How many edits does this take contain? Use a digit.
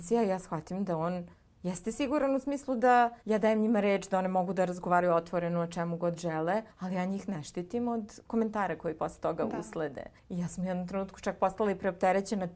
4